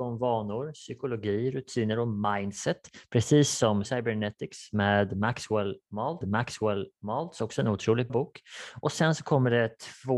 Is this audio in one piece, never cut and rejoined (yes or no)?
no